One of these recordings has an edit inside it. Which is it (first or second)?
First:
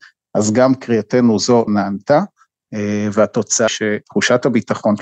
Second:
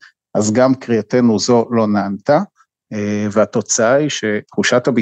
first